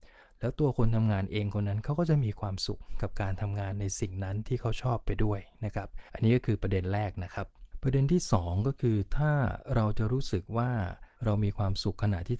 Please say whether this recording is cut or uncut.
cut